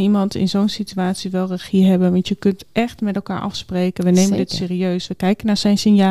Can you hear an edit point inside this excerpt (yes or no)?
no